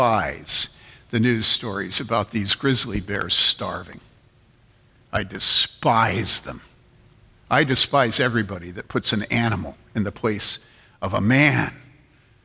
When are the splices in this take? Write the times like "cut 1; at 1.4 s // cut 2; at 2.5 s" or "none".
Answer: none